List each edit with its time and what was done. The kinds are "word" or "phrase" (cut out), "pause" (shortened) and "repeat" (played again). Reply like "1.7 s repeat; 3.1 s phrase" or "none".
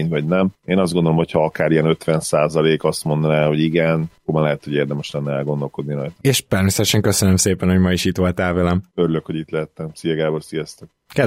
none

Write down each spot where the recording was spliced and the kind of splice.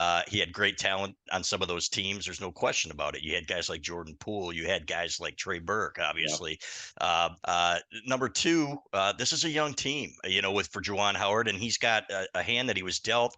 1.3 s word; 7.4 s word

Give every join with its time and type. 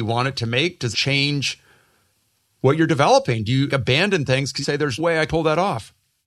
0.9 s word; 3.7 s word; 4.6 s word; 5.0 s word; 5.3 s word

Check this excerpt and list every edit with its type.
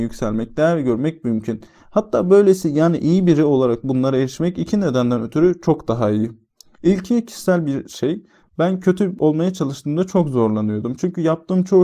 none

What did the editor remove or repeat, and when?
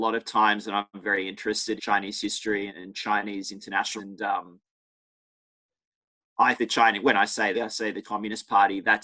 1.0 s word; 1.8 s word; 2.7 s word; 4.0 s word; 6.6 s word; 7.5 s word; 8.0 s word

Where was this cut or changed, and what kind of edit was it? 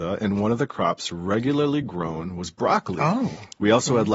none

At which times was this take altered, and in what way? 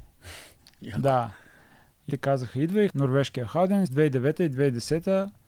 2.1 s word; 2.9 s word; 3.9 s word

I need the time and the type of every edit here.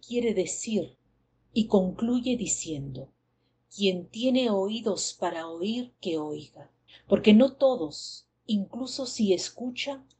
5.9 s pause; 6.9 s pause

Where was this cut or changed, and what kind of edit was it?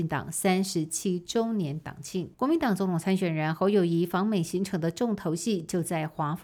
2.3 s pause

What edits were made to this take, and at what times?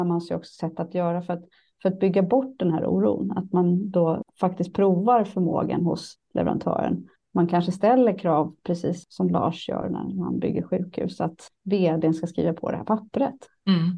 none

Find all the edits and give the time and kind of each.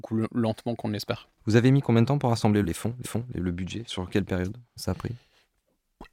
1.4 s pause; 2.6 s word; 3.0 s repeat; 3.9 s word; 4.8 s word

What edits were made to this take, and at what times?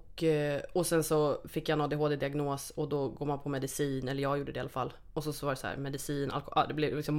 none

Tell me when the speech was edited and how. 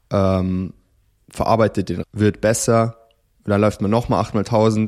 2.0 s word

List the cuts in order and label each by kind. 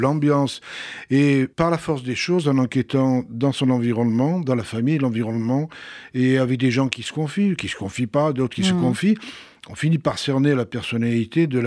1.5 s pause

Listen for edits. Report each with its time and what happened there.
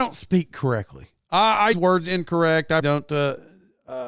1.7 s word; 2.8 s word

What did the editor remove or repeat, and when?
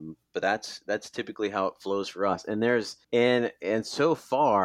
3.0 s pause

